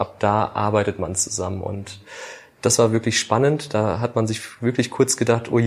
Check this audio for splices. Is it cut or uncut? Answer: uncut